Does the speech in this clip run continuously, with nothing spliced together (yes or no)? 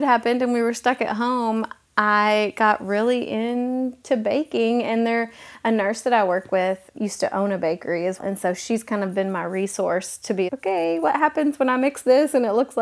no